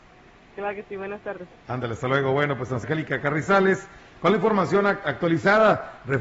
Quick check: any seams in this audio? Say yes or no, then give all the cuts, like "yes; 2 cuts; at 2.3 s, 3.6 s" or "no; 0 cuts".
yes; 1 cut; at 2.8 s